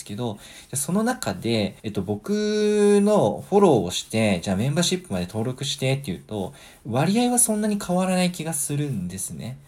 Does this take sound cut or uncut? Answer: cut